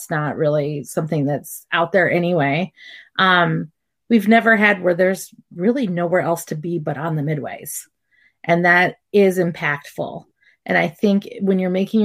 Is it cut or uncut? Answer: uncut